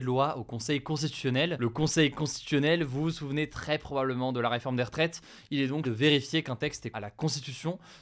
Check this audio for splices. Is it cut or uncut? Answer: cut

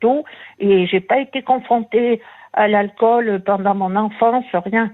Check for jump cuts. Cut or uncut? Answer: uncut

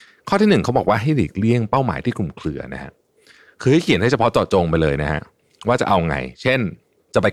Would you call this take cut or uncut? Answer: uncut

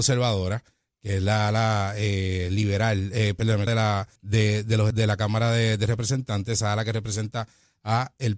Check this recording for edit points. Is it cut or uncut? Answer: cut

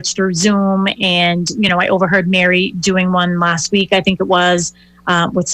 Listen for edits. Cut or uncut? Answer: uncut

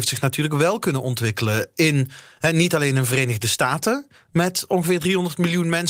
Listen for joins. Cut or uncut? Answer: uncut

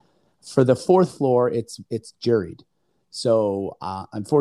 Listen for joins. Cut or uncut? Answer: uncut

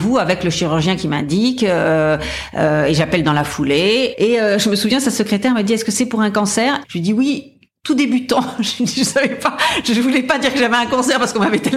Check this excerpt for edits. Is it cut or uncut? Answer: uncut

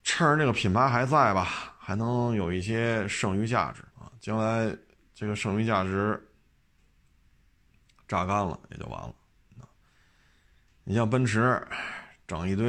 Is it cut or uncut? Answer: cut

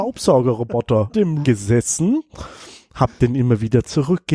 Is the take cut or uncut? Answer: cut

